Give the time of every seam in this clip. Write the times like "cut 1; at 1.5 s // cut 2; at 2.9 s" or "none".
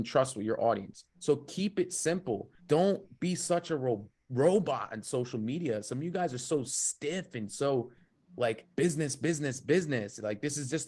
cut 1; at 1.1 s // cut 2; at 2.6 s // cut 3; at 4.2 s // cut 4; at 8.7 s

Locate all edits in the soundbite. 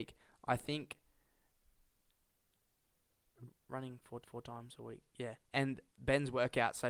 cut 1; at 4.2 s // cut 2; at 5.4 s

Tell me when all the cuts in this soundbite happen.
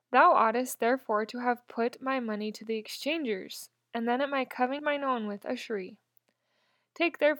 cut 1; at 4.8 s

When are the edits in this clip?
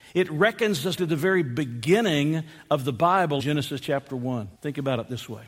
cut 1; at 1.0 s // cut 2; at 3.4 s // cut 3; at 4.5 s

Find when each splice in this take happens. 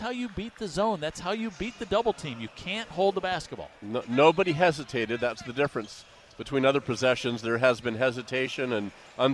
none

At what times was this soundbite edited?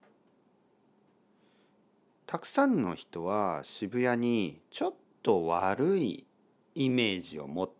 cut 1; at 4.7 s

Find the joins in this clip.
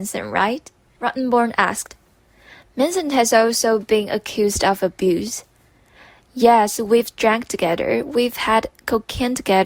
none

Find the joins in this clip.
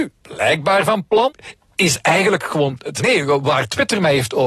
cut 1; at 3.0 s

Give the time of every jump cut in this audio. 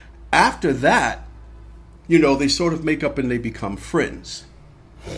none

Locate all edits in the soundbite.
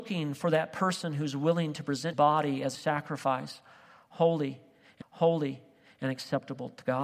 cut 1; at 2.1 s // cut 2; at 2.7 s // cut 3; at 5.0 s

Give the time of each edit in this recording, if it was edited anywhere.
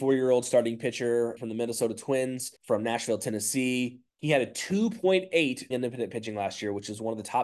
cut 1; at 1.4 s // cut 2; at 2.6 s // cut 3; at 4.1 s // cut 4; at 5.7 s

